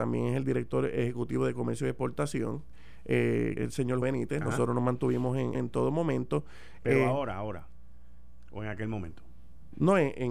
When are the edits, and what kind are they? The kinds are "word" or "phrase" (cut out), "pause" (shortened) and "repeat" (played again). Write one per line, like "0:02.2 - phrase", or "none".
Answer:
0:03.6 - word
0:04.0 - word
0:05.5 - phrase

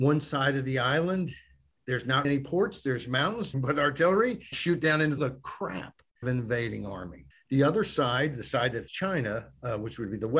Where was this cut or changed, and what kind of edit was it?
0:02.2 - word
0:03.5 - phrase
0:04.5 - word
0:05.2 - phrase
0:06.2 - phrase
0:07.3 - pause
0:08.9 - word

